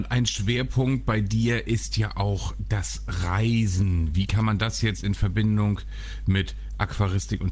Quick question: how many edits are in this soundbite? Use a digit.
0